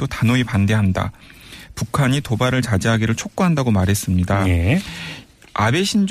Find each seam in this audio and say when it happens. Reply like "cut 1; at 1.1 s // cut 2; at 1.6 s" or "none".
none